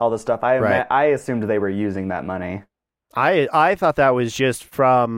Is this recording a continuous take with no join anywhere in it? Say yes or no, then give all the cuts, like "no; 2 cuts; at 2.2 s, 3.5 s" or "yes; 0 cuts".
yes; 0 cuts